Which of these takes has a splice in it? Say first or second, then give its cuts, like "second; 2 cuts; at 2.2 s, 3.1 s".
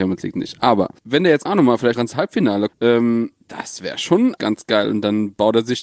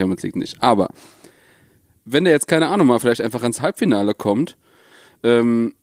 first; 6 cuts; at 1.0 s, 1.5 s, 1.9 s, 2.7 s, 3.4 s, 4.4 s